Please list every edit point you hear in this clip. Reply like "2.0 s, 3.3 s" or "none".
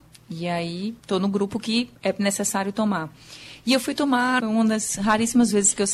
1.0 s, 2.0 s, 4.4 s